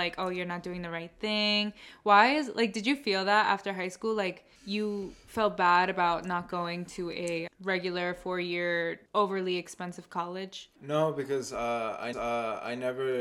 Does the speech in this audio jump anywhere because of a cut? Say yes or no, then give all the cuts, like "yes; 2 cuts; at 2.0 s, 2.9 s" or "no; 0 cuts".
yes; 5 cuts; at 4.6 s, 7.5 s, 9.1 s, 10.8 s, 12.1 s